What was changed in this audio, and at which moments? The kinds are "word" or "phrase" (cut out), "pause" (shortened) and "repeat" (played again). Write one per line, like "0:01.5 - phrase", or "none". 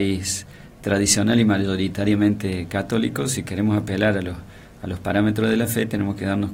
none